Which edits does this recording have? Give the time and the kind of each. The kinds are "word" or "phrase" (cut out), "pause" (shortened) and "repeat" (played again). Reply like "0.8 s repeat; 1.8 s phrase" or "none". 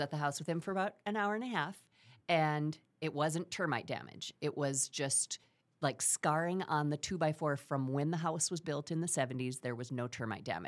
none